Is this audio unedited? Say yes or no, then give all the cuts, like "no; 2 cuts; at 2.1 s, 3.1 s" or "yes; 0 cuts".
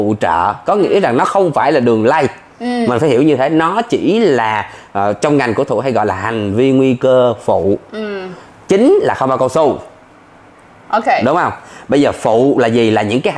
yes; 0 cuts